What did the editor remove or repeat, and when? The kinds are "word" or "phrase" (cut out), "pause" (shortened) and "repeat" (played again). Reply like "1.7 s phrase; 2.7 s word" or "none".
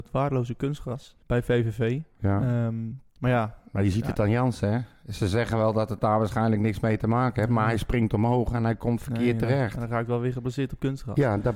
1.2 s pause; 3.1 s pause